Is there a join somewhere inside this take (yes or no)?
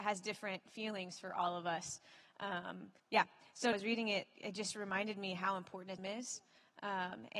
yes